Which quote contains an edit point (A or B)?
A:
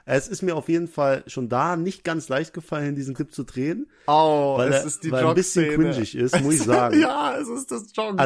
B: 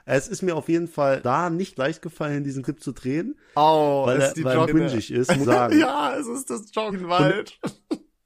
B